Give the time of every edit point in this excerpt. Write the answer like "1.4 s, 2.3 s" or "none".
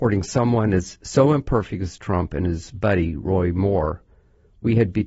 none